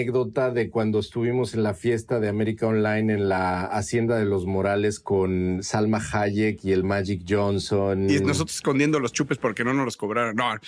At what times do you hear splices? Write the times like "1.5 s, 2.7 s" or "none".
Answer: none